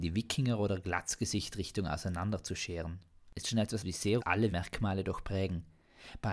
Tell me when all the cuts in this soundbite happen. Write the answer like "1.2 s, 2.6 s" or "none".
3.4 s, 3.8 s, 4.2 s, 4.5 s